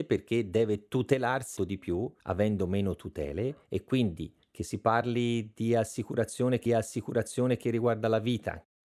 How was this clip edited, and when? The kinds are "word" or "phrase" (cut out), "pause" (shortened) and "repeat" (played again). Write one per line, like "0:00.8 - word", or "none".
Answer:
0:01.6 - word
0:02.2 - pause
0:03.6 - pause
0:06.7 - repeat